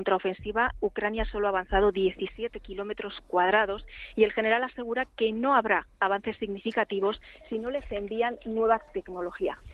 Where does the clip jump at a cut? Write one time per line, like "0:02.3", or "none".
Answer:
none